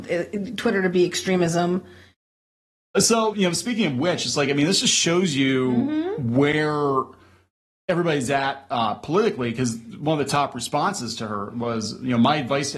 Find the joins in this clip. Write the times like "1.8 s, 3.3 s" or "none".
3.3 s